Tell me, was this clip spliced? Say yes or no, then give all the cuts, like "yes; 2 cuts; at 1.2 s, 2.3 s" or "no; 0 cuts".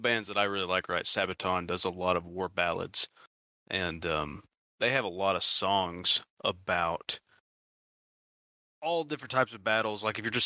no; 0 cuts